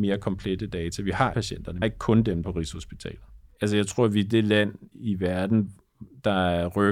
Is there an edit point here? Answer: yes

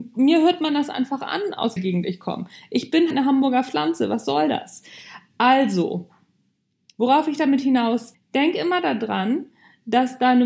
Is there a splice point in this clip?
yes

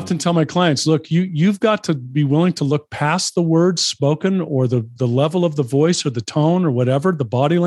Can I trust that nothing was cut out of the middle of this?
yes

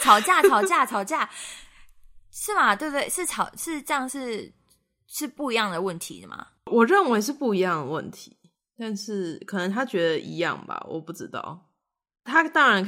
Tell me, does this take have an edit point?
yes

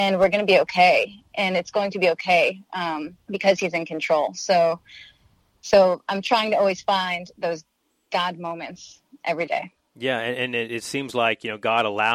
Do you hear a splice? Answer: yes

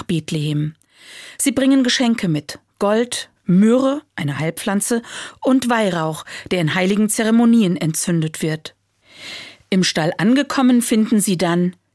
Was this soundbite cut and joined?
yes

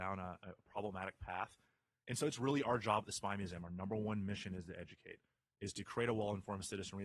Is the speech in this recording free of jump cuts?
yes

